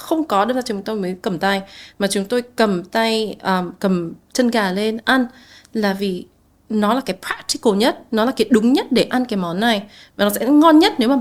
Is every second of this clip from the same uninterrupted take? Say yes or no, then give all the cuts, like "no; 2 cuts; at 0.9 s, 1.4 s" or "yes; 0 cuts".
yes; 0 cuts